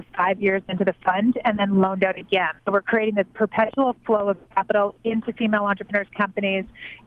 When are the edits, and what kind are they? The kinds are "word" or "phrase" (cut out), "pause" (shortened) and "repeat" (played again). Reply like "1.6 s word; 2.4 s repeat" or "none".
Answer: 2.6 s pause